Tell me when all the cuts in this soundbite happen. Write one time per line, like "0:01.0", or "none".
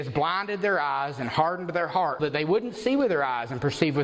0:02.2

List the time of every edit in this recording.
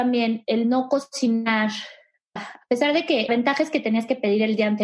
0:02.4
0:03.3

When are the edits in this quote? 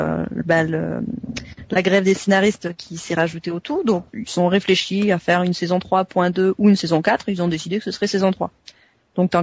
0:04.1

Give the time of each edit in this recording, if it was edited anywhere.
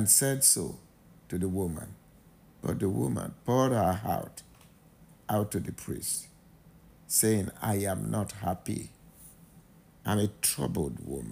none

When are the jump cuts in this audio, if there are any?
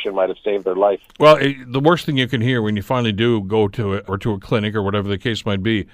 0:04.1

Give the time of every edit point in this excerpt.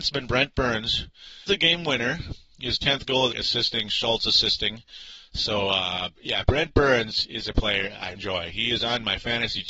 0:01.5
0:03.3
0:06.1
0:08.1

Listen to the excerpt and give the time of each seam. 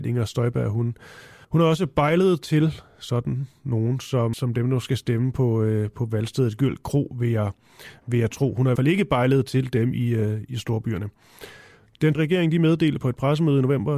0:01.4
0:04.3
0:08.8
0:12.2

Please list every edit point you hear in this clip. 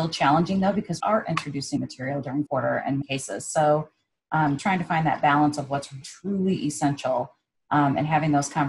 0:01.0
0:01.8
0:02.5
0:03.0
0:04.6
0:06.0

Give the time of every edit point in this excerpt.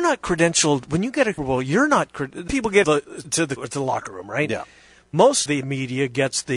0:01.4
0:02.5
0:02.8
0:03.2
0:03.6
0:05.5

